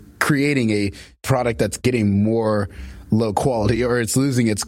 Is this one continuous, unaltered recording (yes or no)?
yes